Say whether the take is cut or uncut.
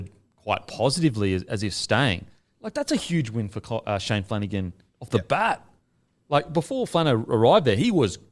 uncut